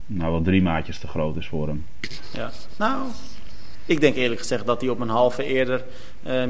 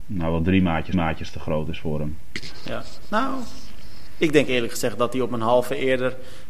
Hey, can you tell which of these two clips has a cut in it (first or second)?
second